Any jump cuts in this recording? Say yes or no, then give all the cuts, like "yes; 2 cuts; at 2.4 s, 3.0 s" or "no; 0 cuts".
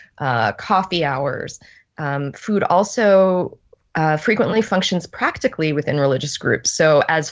no; 0 cuts